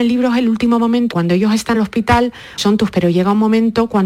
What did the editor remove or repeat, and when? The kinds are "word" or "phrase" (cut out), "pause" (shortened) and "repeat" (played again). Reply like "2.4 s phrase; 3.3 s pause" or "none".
1.1 s word; 1.7 s word; 2.6 s word; 2.9 s word